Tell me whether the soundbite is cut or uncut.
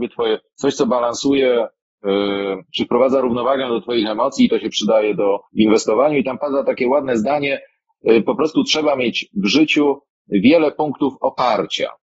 cut